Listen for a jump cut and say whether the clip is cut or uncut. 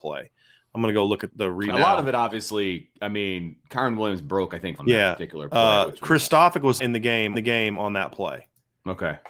cut